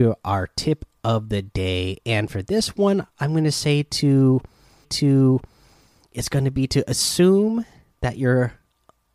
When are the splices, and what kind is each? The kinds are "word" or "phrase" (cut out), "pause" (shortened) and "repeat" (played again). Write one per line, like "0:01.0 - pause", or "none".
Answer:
0:04.8 - repeat